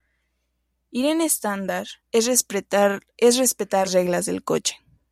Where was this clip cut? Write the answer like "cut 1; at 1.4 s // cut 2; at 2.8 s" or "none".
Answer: cut 1; at 2.0 s // cut 2; at 3.1 s // cut 3; at 3.9 s